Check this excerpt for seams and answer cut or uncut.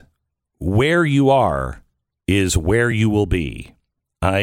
uncut